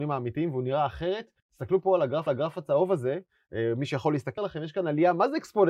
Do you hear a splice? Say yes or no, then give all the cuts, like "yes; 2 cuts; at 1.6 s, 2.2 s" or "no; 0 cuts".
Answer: yes; 3 cuts; at 1.4 s, 2.3 s, 4.4 s